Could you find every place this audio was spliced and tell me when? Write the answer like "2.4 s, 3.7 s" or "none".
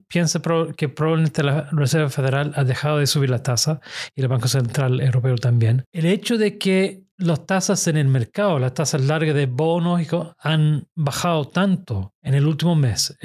none